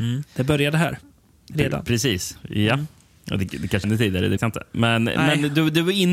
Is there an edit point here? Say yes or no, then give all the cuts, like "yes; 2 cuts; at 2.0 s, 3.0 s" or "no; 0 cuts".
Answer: yes; 2 cuts; at 3.8 s, 4.4 s